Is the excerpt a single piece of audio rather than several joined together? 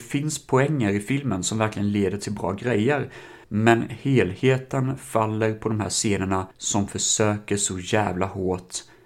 no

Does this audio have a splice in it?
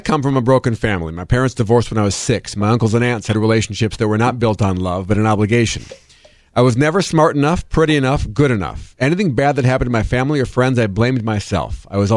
no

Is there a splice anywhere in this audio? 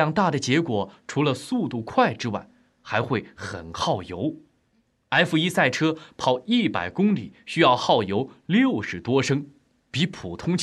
no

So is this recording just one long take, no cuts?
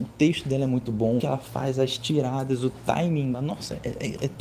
no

